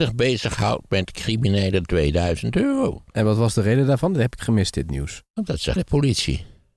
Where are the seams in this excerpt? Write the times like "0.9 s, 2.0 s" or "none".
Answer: 1.8 s, 4.4 s, 5.8 s